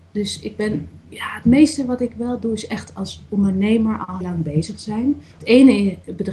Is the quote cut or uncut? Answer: cut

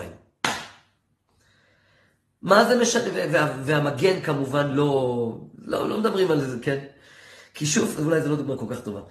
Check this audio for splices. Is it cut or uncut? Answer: uncut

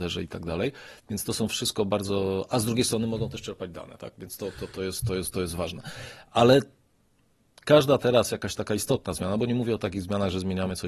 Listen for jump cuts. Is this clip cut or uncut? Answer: uncut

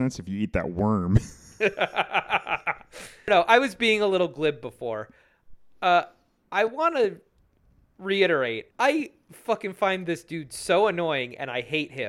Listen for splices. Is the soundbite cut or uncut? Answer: cut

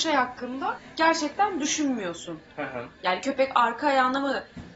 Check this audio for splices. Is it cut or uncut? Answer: uncut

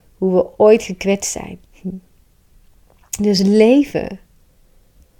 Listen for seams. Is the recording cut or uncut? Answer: cut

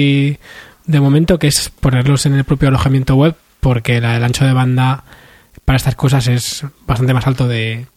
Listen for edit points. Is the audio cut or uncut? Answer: uncut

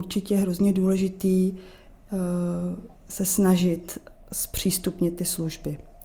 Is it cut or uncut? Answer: cut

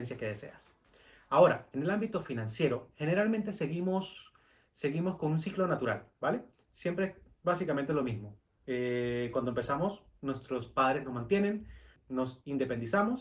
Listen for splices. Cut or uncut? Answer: uncut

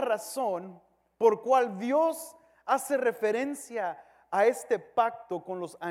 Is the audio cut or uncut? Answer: uncut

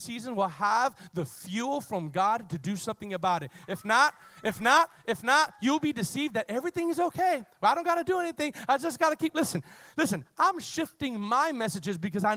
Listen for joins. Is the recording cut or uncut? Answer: uncut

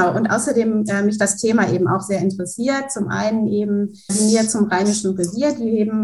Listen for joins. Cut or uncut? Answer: cut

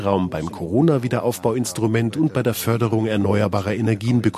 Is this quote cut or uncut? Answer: uncut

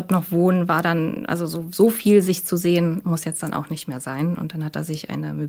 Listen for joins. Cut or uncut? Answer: uncut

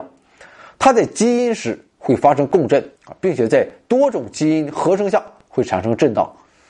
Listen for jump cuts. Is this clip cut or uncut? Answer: cut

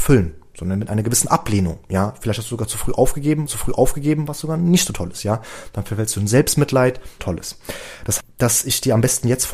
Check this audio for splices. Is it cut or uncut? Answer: cut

